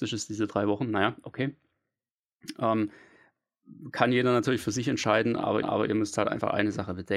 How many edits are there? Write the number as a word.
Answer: one